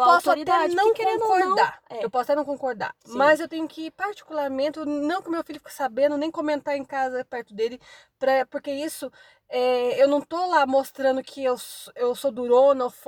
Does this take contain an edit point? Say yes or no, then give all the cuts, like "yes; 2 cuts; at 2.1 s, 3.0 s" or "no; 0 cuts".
no; 0 cuts